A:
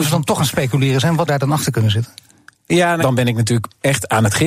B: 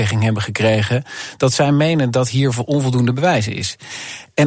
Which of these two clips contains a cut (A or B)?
A